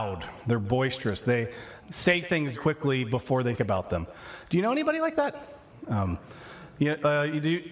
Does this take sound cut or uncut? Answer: cut